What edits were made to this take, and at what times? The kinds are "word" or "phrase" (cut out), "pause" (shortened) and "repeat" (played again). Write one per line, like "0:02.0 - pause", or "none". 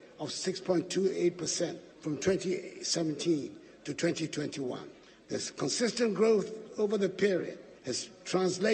0:01.9 - pause
0:05.0 - pause
0:07.8 - pause